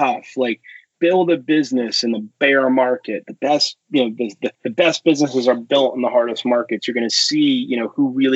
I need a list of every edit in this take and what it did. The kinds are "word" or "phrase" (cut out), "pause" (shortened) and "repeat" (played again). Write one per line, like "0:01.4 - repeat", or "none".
0:04.5 - pause